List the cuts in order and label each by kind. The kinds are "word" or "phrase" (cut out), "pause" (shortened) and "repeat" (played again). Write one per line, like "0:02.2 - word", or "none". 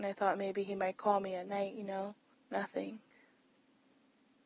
0:02.3 - pause